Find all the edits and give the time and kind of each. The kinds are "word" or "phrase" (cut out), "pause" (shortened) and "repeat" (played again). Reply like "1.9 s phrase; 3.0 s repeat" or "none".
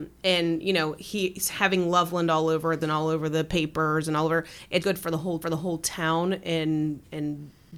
2.8 s word; 4.8 s word; 5.4 s repeat